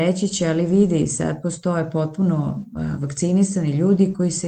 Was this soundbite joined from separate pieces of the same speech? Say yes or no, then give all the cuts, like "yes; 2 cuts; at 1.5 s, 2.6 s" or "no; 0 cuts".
no; 0 cuts